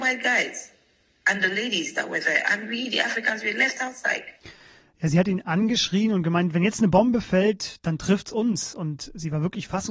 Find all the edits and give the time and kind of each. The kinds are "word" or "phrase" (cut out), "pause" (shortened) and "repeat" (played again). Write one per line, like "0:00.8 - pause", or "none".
none